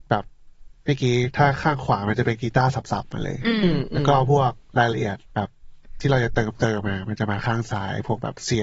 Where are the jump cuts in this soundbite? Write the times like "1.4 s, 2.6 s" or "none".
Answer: 5.3 s